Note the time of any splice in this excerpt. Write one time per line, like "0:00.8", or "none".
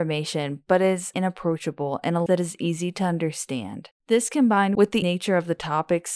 0:01.1
0:02.3
0:04.0
0:05.0